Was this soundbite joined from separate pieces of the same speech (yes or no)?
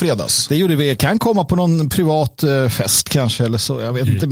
no